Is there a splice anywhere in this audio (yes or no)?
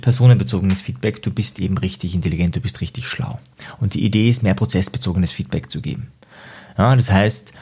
no